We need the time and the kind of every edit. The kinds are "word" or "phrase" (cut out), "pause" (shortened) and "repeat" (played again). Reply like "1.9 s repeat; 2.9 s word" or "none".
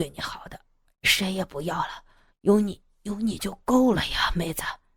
none